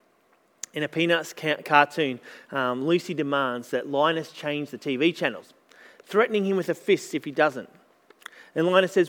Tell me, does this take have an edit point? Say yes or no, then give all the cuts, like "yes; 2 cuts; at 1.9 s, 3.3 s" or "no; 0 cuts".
no; 0 cuts